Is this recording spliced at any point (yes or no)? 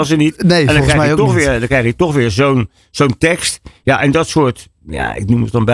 no